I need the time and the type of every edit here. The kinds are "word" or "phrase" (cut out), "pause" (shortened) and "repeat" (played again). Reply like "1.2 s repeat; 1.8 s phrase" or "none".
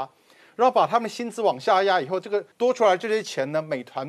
2.5 s pause